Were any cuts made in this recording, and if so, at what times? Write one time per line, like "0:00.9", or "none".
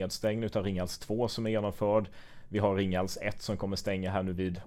none